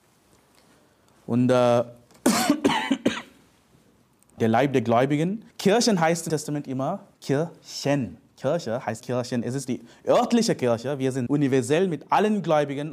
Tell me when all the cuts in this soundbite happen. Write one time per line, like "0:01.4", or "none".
0:04.4
0:05.5
0:06.3
0:07.1
0:09.0
0:11.3